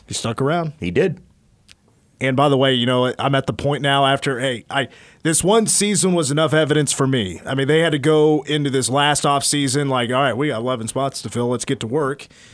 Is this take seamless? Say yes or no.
yes